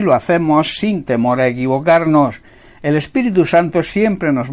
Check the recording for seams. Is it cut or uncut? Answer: uncut